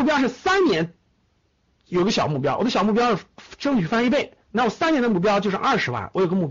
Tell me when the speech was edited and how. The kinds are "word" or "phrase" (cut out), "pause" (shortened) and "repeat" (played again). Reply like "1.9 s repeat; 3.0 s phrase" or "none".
4.4 s pause